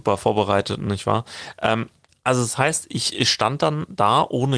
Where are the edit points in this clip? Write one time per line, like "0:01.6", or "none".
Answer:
0:02.1